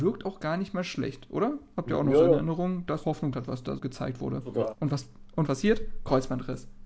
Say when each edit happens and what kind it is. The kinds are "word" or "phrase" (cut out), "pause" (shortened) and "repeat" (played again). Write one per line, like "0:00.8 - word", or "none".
0:03.0 - word
0:03.3 - word
0:03.8 - word
0:05.5 - word